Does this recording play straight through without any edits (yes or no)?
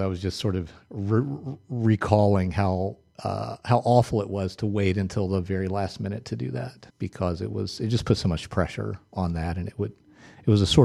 no